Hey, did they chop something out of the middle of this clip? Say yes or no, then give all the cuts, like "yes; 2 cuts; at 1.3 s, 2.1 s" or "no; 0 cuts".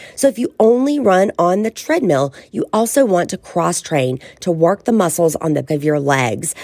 yes; 1 cut; at 5.7 s